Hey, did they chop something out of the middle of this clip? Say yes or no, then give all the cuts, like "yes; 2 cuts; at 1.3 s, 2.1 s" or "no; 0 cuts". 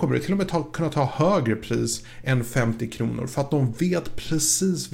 no; 0 cuts